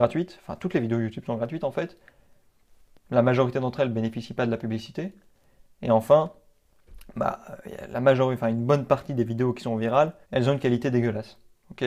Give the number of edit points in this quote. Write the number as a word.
one